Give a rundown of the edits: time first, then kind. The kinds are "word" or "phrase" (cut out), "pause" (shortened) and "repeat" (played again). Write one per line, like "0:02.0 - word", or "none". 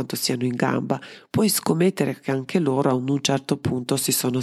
none